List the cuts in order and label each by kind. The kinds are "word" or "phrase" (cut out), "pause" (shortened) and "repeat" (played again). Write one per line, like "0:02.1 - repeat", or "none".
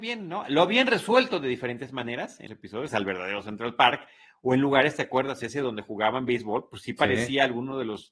0:02.5 - word
0:02.9 - phrase